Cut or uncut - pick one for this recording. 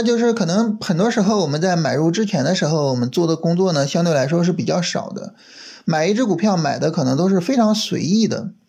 uncut